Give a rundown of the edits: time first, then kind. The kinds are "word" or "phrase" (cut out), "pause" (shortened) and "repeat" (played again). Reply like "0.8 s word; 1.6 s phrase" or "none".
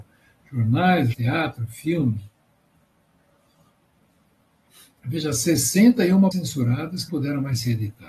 1.1 s word; 6.3 s word; 7.1 s word